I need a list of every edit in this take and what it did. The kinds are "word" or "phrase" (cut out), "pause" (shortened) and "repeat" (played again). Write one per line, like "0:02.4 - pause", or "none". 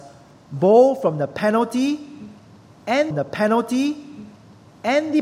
0:03.1 - repeat